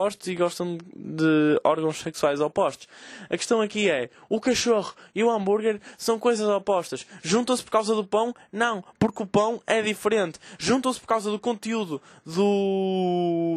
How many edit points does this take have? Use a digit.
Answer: 0